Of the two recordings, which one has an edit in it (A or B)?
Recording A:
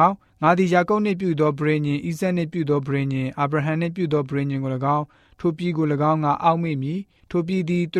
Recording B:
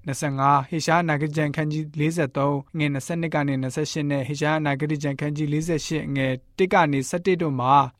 B